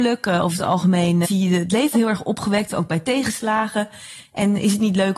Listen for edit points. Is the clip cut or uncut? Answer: cut